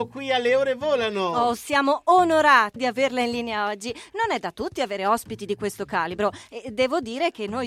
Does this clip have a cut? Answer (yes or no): yes